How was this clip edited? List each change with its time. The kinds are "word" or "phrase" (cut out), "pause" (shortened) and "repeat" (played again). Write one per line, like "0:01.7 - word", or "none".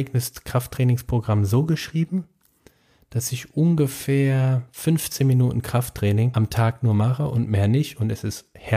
none

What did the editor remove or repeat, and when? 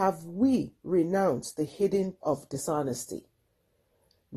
0:02.2 - word

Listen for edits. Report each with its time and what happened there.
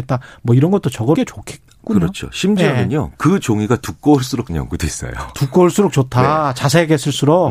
0:01.2 - word
0:04.5 - word

